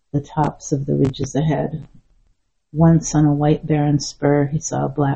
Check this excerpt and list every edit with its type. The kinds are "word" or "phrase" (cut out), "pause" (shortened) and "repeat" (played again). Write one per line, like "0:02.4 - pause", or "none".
none